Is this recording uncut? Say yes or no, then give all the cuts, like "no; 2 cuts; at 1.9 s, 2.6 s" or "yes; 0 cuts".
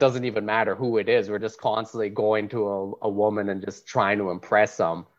yes; 0 cuts